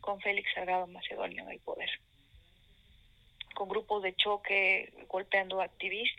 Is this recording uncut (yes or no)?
yes